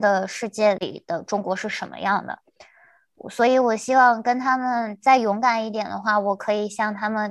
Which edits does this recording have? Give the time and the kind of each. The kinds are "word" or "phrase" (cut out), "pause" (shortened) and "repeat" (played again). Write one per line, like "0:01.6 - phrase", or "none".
none